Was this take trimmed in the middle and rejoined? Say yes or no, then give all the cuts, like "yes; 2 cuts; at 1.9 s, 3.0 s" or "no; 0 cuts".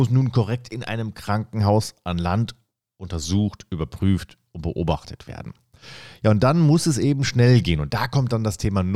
no; 0 cuts